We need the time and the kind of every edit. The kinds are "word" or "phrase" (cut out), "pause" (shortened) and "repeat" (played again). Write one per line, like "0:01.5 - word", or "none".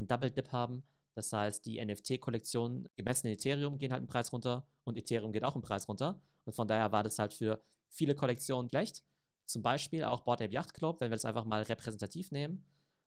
0:08.7 - word